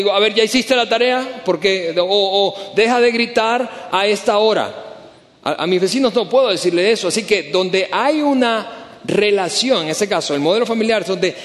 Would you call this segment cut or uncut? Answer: uncut